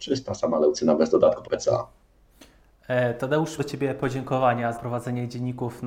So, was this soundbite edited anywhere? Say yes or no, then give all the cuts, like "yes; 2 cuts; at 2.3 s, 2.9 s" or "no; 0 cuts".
yes; 3 cuts; at 1.4 s, 3.6 s, 4.7 s